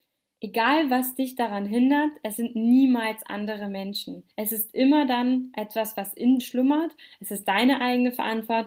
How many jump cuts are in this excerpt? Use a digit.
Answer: 2